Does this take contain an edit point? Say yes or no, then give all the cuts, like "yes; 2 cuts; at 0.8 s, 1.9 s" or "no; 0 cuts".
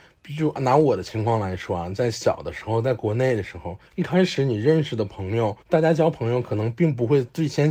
yes; 2 cuts; at 3.9 s, 5.6 s